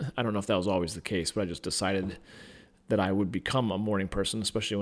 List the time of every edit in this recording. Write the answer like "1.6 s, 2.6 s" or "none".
none